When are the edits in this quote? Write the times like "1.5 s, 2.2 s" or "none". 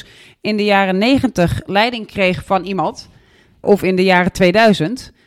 3.6 s

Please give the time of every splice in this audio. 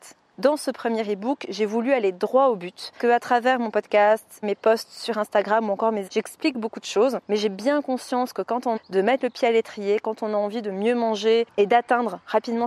3.0 s, 4.4 s, 6.1 s, 7.2 s, 8.8 s

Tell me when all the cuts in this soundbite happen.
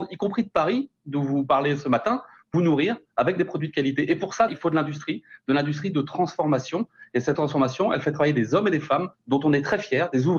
2.5 s, 4.5 s, 7.3 s, 9.1 s

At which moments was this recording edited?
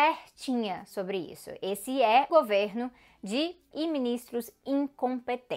2.3 s, 3.7 s

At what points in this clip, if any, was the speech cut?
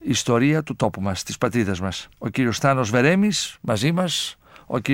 2.1 s

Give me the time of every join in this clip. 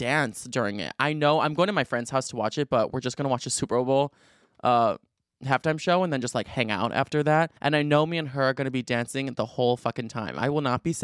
7.6 s

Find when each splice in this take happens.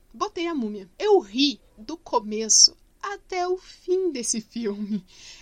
0.9 s, 1.7 s

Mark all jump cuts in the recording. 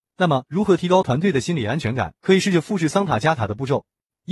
2.2 s

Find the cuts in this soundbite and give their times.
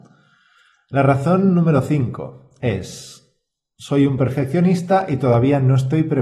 none

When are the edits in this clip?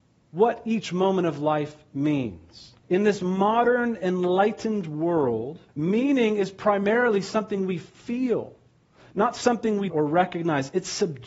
2.8 s, 5.7 s, 9.9 s

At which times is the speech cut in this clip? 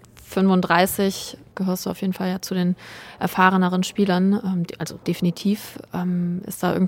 1.5 s, 5.0 s

